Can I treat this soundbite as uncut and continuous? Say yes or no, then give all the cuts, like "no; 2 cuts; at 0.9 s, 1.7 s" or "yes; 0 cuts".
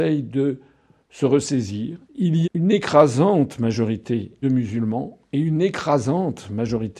no; 3 cuts; at 2.0 s, 2.4 s, 4.4 s